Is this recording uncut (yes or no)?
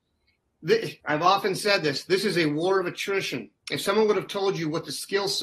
no